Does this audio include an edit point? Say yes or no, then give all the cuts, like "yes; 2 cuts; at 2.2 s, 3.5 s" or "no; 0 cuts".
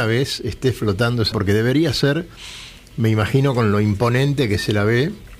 yes; 1 cut; at 1.3 s